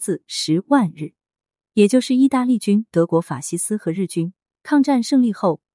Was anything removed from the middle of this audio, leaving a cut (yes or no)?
no